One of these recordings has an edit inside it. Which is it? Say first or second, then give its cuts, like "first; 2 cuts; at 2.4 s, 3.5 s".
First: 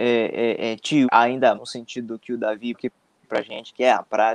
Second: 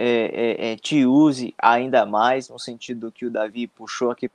first; 3 cuts; at 1.0 s, 1.5 s, 2.7 s